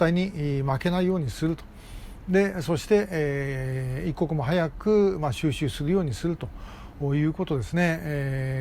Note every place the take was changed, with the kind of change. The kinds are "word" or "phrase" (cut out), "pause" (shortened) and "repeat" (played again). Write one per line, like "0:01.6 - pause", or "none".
none

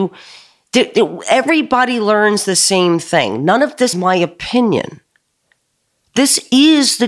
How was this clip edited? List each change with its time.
0:03.9 - word

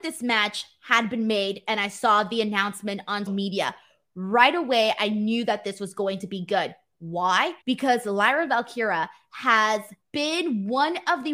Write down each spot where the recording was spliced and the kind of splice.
0:03.3 - word
0:07.6 - pause
0:10.0 - pause

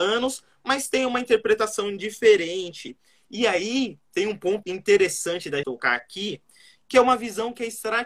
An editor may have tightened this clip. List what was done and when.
0:04.6 - word
0:05.6 - word

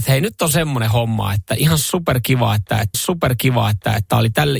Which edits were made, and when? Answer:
0:02.9 - repeat

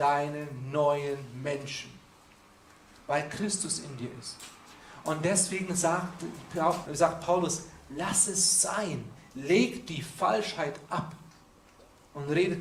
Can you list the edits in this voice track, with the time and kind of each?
0:06.9 - word

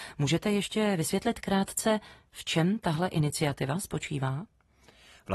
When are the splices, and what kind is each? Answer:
none

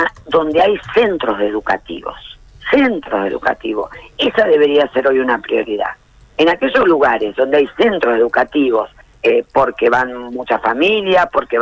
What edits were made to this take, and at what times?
0:02.5 - pause
0:09.0 - pause

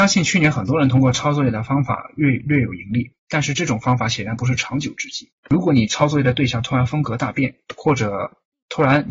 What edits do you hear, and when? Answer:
0:05.4 - pause

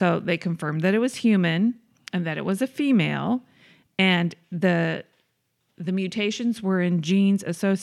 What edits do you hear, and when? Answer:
none

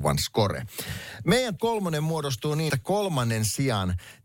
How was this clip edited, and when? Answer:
0:01.6 - word
0:02.7 - word

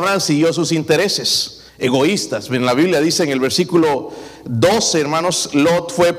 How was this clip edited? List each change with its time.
0:01.7 - pause

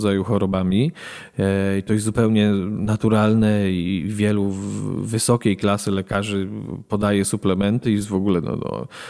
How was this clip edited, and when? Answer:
none

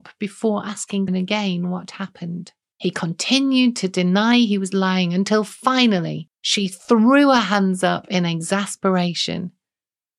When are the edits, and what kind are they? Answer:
0:01.1 - word
0:02.7 - pause
0:06.4 - pause

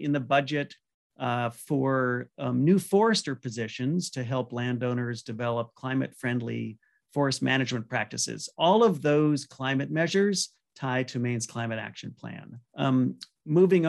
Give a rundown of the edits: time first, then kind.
0:12.7 - pause

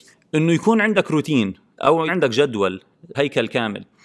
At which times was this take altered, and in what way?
0:02.1 - word
0:03.1 - word

